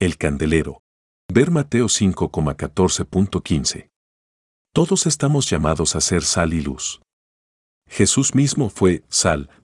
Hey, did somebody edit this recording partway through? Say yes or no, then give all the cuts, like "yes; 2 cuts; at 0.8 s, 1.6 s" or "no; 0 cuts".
no; 0 cuts